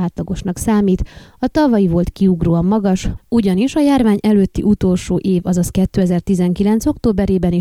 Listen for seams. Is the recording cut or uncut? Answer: uncut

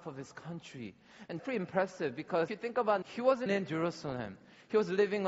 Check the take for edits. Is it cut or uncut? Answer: cut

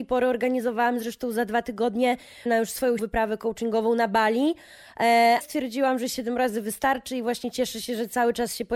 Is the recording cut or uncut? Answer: cut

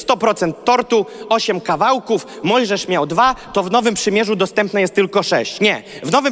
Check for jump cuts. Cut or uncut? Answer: uncut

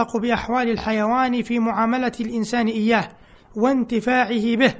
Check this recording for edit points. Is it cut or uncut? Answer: uncut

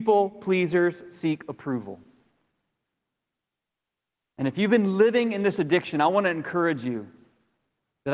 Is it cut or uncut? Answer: uncut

